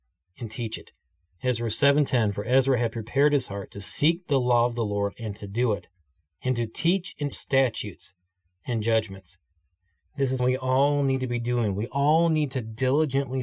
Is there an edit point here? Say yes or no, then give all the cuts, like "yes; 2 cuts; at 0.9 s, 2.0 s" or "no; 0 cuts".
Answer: yes; 2 cuts; at 7.3 s, 10.4 s